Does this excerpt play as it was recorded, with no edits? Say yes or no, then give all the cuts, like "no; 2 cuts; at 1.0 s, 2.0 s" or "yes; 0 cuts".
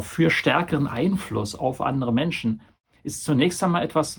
yes; 0 cuts